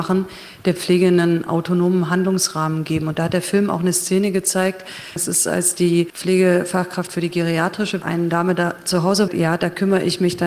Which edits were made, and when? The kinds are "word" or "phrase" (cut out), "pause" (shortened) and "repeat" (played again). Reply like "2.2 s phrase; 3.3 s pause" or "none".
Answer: 8.0 s phrase; 9.3 s phrase

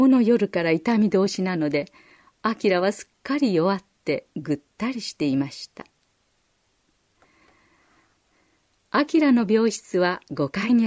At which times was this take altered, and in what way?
4.3 s pause

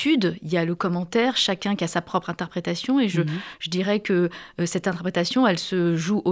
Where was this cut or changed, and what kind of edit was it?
none

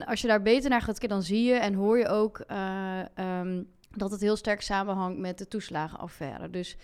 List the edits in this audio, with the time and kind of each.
1.0 s word; 3.8 s pause

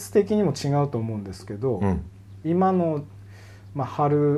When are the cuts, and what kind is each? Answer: 2.4 s phrase

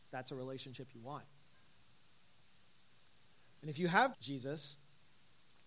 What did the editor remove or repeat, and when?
4.1 s word

